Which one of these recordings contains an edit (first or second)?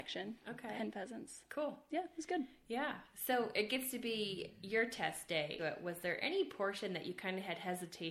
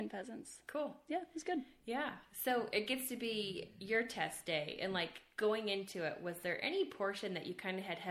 first